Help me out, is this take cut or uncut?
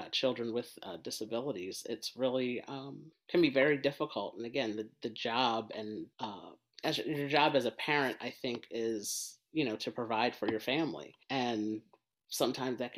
cut